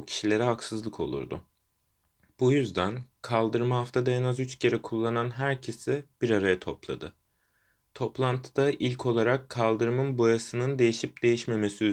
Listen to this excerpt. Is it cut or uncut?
uncut